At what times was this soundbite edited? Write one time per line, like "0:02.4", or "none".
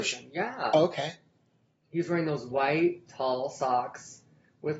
none